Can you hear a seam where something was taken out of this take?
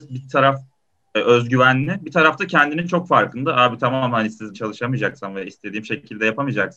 yes; 1 cut; at 4.5 s

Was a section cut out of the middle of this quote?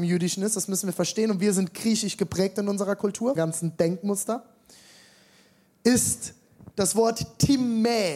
yes; 1 cut; at 3.4 s

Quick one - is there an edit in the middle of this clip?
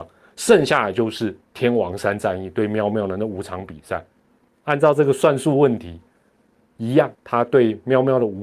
yes; 3 cuts; at 1.4 s, 4.6 s, 7.1 s

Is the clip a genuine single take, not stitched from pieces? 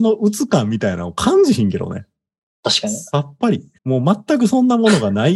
no; 1 cut; at 3.8 s

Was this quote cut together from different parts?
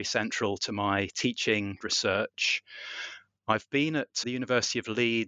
yes; 2 cuts; at 1.8 s, 4.2 s

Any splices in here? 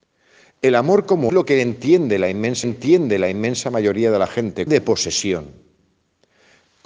yes; 3 cuts; at 1.3 s, 2.6 s, 4.7 s

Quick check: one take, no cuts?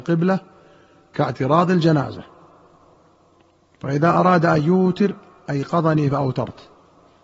yes; 0 cuts

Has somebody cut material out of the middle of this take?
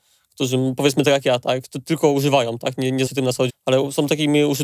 yes; 2 cuts; at 3.1 s, 3.5 s

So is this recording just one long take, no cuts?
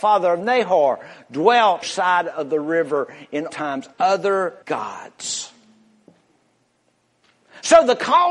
no; 4 cuts; at 1.8 s, 3.5 s, 3.9 s, 4.6 s

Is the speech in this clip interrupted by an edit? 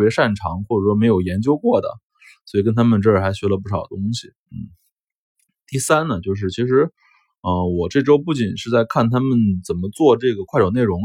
no; 0 cuts

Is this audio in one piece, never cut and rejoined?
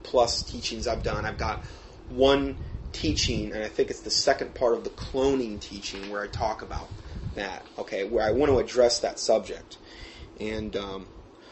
yes; 0 cuts

